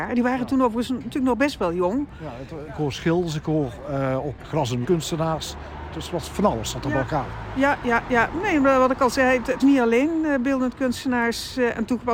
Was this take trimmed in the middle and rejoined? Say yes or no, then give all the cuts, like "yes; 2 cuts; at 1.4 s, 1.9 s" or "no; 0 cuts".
yes; 4 cuts; at 2.7 s, 4.4 s, 4.8 s, 9.6 s